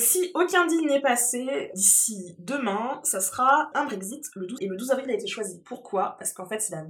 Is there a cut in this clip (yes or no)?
yes